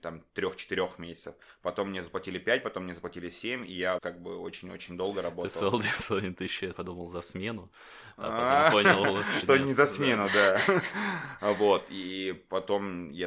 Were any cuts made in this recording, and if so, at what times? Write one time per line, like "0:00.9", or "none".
0:04.0
0:06.7
0:09.4